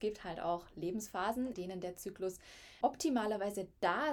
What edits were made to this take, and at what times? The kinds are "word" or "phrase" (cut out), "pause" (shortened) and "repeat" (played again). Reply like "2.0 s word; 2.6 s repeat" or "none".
1.5 s word; 2.8 s word